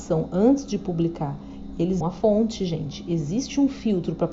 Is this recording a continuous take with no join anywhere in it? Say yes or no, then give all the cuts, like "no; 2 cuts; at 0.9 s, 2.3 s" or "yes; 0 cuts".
no; 1 cut; at 2.0 s